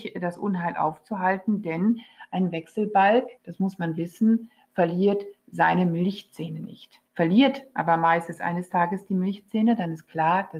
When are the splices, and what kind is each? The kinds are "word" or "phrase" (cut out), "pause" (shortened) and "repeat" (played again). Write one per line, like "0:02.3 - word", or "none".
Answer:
0:03.4 - pause
0:07.1 - pause